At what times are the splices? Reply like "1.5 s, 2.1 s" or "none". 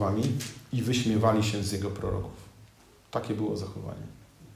none